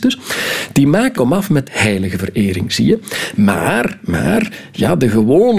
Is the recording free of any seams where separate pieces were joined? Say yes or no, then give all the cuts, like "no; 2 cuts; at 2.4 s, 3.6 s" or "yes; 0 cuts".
no; 2 cuts; at 1.1 s, 1.6 s